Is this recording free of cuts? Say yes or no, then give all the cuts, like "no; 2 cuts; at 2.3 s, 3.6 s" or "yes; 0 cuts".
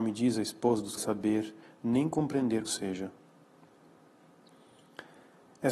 no; 2 cuts; at 1.0 s, 2.7 s